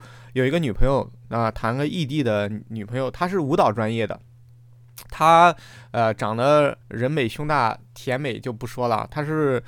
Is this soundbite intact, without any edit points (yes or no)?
no